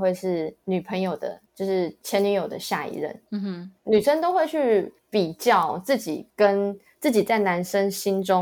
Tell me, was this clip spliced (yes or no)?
yes